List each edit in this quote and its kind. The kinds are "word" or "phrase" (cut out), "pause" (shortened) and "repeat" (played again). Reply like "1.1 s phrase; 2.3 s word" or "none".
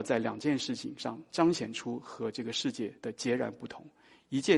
3.0 s pause